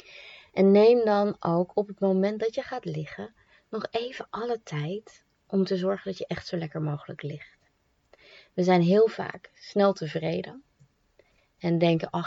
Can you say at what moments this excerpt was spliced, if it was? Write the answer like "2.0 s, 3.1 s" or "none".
none